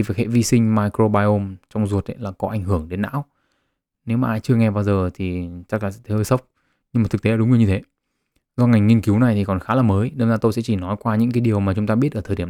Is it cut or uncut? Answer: uncut